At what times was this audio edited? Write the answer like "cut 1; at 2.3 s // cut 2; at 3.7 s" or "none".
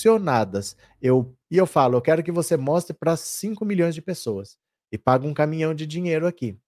cut 1; at 1.4 s